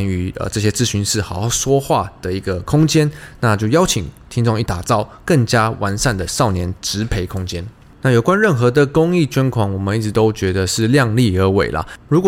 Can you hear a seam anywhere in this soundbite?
no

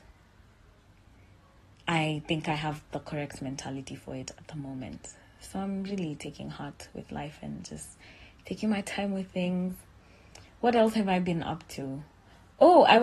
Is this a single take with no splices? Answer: yes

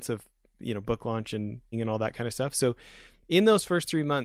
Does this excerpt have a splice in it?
yes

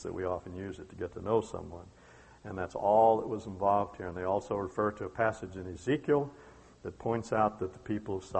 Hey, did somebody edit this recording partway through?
no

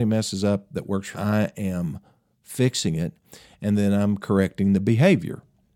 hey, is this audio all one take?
no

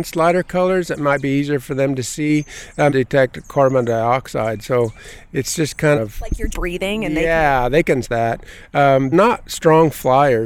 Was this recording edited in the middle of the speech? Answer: yes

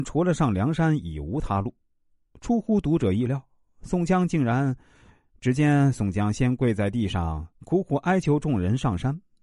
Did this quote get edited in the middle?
no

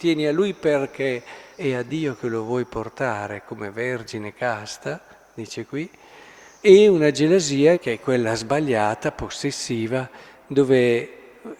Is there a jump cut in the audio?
yes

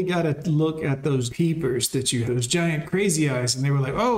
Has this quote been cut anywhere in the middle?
yes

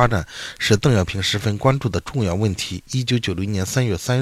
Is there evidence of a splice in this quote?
no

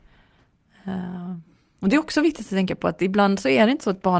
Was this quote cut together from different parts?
no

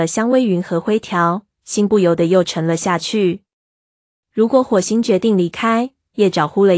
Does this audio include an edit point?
no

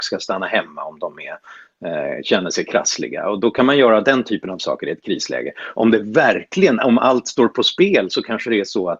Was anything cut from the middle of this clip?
no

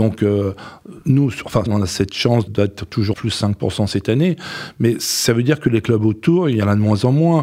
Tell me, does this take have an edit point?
yes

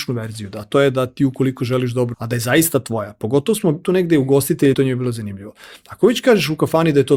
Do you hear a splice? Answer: yes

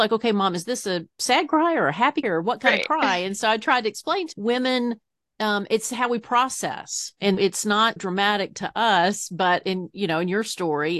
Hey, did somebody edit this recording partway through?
yes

